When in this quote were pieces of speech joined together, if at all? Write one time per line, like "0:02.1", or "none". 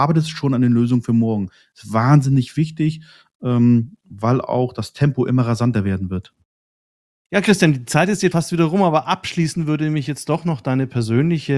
0:08.3